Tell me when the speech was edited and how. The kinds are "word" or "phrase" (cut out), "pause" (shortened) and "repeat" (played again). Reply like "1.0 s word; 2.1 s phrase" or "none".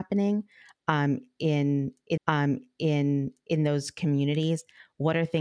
2.2 s repeat